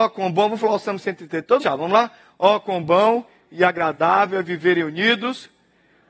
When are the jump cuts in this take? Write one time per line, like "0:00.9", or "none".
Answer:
0:01.6